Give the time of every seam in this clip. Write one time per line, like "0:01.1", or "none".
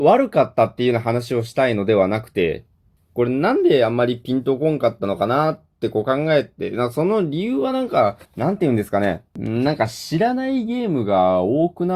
0:02.8
0:08.3
0:09.3